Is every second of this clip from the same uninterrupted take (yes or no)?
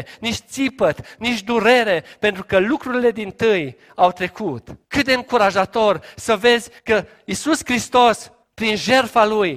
no